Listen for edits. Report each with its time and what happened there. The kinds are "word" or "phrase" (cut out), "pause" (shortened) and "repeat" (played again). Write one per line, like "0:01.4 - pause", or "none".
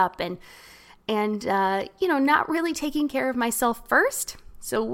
none